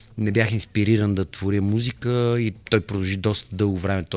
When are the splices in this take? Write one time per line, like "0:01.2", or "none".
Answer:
0:02.6